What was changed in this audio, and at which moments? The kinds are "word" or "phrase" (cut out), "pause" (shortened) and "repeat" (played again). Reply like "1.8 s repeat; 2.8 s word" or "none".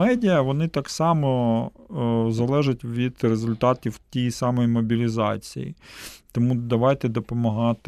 4.0 s pause